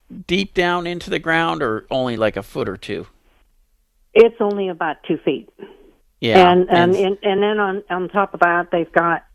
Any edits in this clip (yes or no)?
no